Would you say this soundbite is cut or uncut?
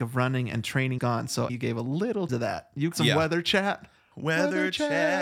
cut